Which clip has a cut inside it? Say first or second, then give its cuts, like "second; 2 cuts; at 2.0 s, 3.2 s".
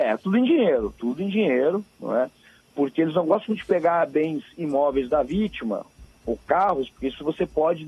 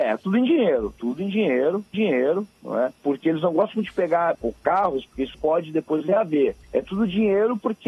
second; 5 cuts; at 1.9 s, 3.0 s, 4.3 s, 5.3 s, 6.6 s